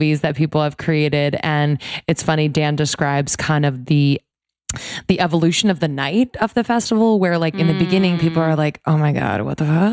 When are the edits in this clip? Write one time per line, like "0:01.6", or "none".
none